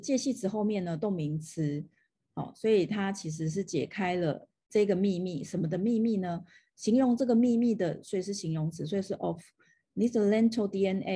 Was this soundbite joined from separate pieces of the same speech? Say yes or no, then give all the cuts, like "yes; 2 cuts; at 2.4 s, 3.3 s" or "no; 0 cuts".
no; 0 cuts